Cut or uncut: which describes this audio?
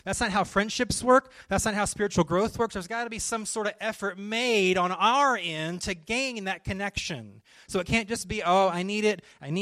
uncut